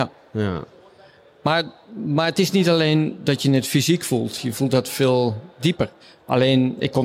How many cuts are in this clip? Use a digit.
1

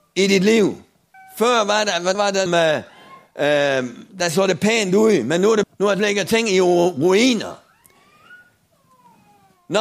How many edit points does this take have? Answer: 5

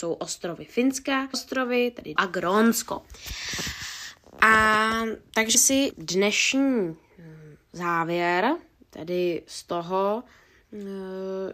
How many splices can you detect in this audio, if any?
4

